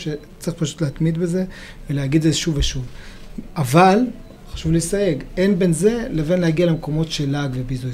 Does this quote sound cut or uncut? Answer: uncut